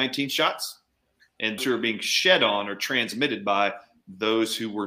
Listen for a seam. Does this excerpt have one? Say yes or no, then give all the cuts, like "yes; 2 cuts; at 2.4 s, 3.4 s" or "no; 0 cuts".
yes; 1 cut; at 1.6 s